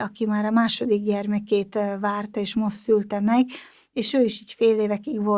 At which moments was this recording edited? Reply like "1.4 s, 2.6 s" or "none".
none